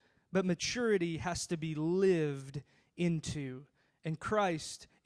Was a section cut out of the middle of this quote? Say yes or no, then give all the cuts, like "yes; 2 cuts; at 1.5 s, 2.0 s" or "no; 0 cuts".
no; 0 cuts